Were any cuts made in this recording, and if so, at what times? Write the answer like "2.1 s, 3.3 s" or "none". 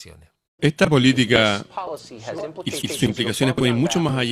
2.8 s